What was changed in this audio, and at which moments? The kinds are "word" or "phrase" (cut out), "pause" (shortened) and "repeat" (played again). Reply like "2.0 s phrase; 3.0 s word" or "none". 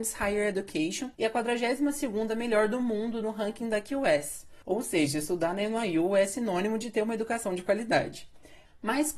1.1 s pause